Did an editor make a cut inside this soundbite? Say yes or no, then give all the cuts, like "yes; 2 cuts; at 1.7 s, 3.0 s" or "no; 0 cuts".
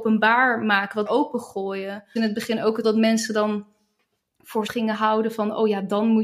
yes; 4 cuts; at 1.1 s, 2.2 s, 2.8 s, 4.7 s